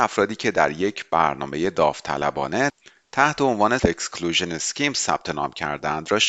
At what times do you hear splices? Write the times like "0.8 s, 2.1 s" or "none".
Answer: 3.8 s